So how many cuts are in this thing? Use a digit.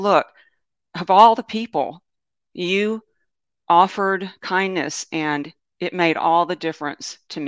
0